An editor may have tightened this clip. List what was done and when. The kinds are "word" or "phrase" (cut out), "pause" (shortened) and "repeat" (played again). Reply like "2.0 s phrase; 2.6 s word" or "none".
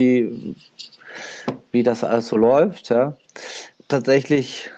none